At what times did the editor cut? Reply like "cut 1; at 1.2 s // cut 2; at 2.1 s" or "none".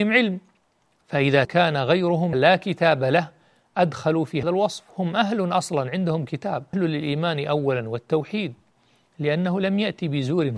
cut 1; at 1.4 s // cut 2; at 2.3 s // cut 3; at 4.4 s // cut 4; at 6.7 s

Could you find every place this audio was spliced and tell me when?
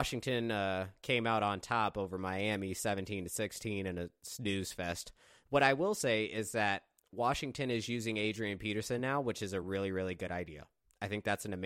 none

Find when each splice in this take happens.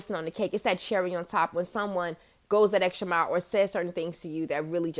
none

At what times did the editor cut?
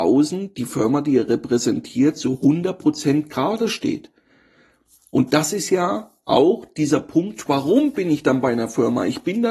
none

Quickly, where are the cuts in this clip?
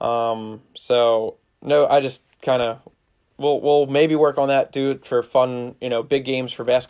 none

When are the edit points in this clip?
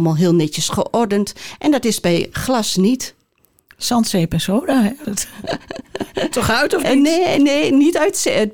cut 1; at 5.0 s // cut 2; at 6.3 s

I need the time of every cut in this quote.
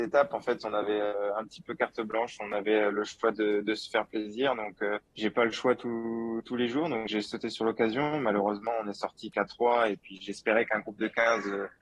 cut 1; at 5.1 s

